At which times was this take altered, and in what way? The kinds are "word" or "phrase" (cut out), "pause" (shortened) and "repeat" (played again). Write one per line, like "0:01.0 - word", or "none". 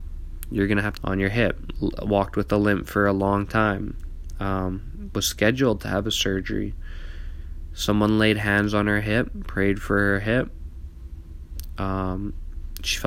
0:01.0 - phrase